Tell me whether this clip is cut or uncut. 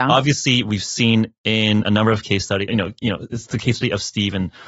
cut